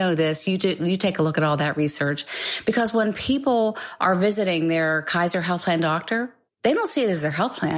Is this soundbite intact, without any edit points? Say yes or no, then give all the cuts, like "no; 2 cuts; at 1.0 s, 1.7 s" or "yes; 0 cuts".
no; 1 cut; at 6.5 s